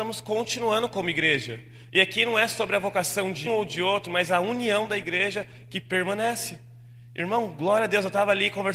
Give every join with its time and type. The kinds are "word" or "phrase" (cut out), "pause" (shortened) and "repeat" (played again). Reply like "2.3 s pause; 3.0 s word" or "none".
3.5 s word